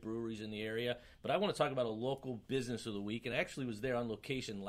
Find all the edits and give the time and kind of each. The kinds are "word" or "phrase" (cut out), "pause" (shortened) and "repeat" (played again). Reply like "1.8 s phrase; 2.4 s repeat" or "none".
none